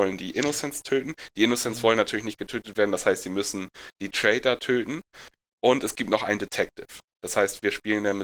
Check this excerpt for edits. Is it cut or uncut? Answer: uncut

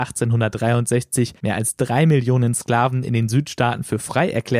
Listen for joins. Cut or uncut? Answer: cut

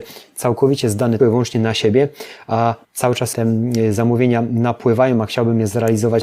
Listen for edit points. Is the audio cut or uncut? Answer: cut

